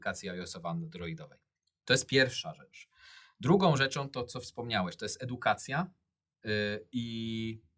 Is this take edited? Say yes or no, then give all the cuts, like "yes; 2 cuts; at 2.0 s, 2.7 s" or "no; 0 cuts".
no; 0 cuts